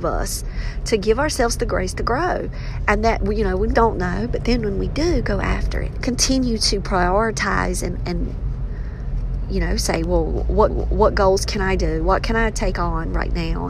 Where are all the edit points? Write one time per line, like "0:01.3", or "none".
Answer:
0:03.7
0:06.0
0:10.7